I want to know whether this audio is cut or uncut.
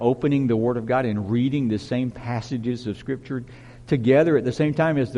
uncut